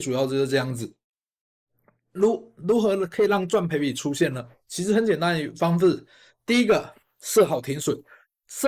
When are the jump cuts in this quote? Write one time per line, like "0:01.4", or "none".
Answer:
none

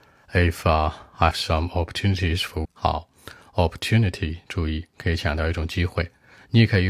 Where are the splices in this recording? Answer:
0:01.3
0:02.6

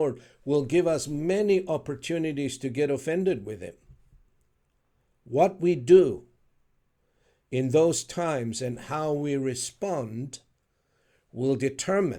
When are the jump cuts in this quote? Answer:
none

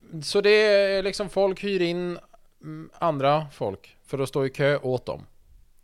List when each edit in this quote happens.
none

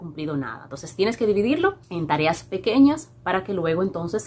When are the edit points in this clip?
0:01.8

